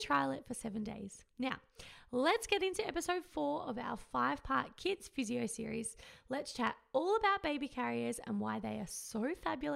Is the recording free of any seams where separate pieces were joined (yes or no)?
yes